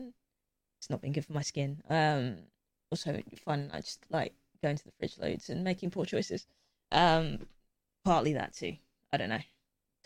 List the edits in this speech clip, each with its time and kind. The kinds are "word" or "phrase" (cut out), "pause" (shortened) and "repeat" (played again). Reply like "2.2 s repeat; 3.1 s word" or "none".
none